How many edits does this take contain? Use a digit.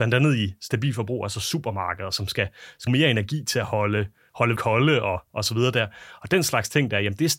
2